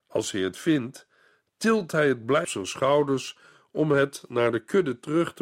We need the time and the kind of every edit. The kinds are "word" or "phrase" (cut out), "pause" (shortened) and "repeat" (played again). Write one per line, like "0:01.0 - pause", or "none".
0:02.4 - word